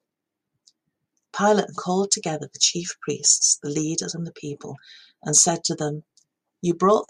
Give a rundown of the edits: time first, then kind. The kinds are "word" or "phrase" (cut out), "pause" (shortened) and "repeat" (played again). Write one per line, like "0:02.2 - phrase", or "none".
0:01.7 - word